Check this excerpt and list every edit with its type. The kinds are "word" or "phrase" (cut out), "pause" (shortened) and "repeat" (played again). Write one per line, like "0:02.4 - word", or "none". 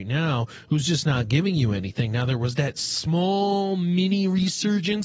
none

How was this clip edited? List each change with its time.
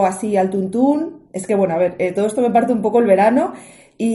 none

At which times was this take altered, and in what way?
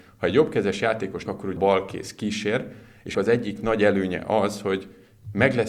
0:01.3 - word
0:01.6 - word
0:03.1 - word

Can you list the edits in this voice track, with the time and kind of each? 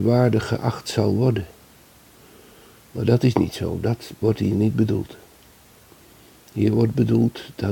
none

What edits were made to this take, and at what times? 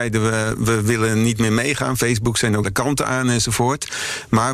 0:02.6 - word

